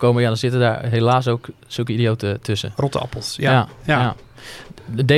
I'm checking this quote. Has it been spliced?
no; 0 cuts

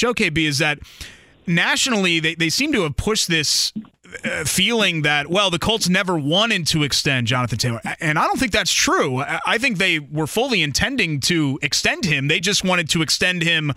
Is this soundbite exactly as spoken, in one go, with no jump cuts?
yes; 0 cuts

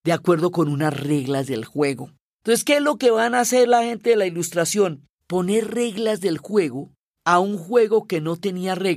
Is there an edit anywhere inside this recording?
no; 0 cuts

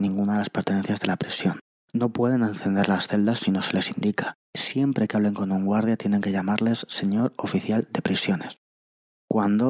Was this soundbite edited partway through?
yes; 2 cuts; at 1.7 s, 4.4 s

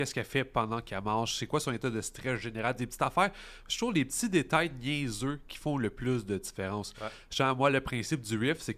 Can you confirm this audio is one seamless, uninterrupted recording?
yes; 0 cuts

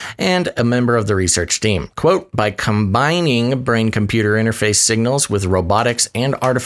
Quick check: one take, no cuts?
yes; 0 cuts

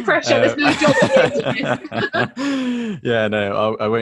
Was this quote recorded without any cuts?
yes; 0 cuts

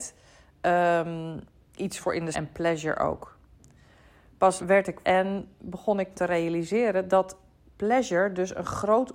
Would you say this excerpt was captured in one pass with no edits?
no; 5 cuts; at 2.0 s, 2.3 s, 4.6 s, 5.0 s, 6.1 s

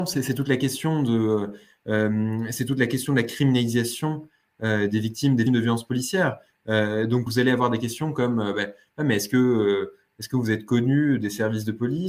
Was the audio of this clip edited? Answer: yes; 2 cuts; at 5.5 s, 7.3 s

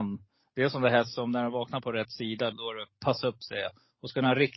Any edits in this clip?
yes; 1 cut; at 2.5 s

